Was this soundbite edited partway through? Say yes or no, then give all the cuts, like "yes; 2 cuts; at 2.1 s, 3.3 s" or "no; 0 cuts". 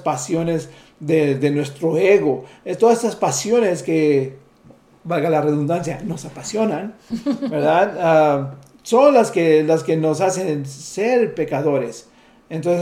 no; 0 cuts